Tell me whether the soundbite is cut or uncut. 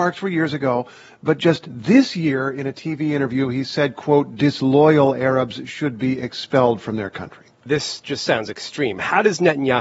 uncut